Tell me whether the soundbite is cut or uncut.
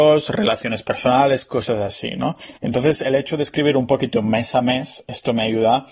cut